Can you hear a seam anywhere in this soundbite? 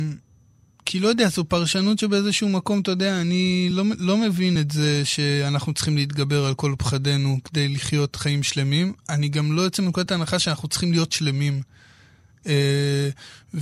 no; 0 cuts

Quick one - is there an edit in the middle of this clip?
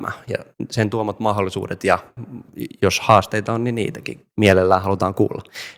yes; 1 cut; at 4.3 s

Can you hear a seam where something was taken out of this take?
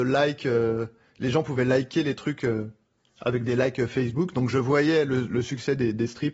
no; 0 cuts

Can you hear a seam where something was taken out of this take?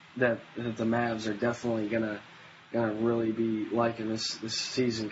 no; 0 cuts

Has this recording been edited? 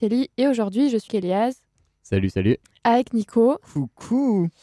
yes; 1 cut; at 1.1 s

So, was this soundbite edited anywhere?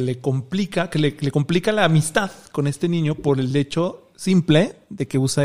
no; 0 cuts

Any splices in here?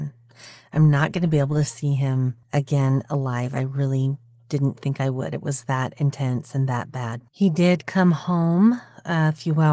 yes; 2 cuts; at 2.4 s, 7.3 s

